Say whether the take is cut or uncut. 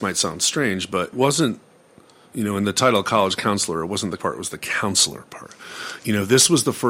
cut